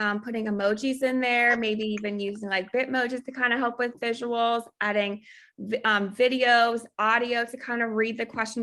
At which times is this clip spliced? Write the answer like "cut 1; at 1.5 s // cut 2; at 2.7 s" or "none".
none